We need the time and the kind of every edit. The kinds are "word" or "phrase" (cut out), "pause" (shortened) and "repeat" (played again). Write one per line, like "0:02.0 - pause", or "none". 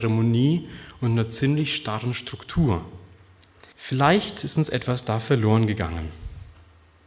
0:03.7 - pause